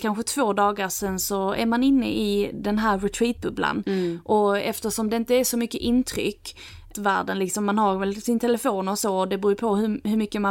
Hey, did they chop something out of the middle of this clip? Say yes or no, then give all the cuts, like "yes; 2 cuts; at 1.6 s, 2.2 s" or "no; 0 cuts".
yes; 1 cut; at 6.9 s